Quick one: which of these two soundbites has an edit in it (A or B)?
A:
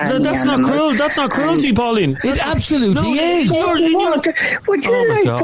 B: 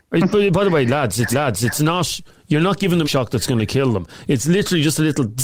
B